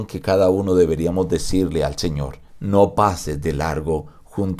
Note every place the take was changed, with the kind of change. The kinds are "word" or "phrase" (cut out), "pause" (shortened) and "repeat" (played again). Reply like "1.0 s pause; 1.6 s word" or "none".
2.5 s pause